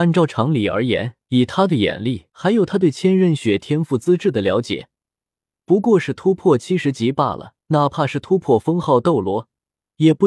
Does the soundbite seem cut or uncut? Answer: cut